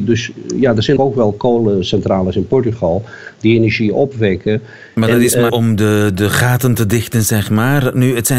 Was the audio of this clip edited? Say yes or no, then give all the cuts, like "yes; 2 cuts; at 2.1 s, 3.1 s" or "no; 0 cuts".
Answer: yes; 2 cuts; at 1.0 s, 5.5 s